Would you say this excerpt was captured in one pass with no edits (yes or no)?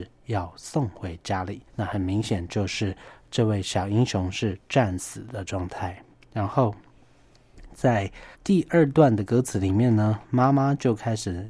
no